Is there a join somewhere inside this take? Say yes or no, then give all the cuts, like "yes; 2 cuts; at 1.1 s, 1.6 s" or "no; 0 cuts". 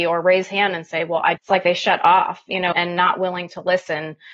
yes; 2 cuts; at 1.4 s, 2.7 s